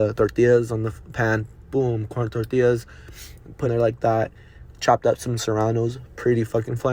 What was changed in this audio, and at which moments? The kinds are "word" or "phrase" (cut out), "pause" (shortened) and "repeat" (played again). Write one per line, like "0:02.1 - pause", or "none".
0:03.6 - phrase